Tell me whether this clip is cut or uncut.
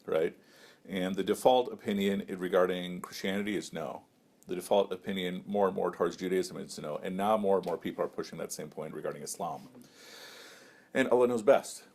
uncut